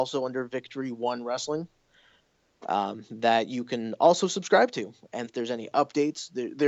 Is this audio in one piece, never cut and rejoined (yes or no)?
no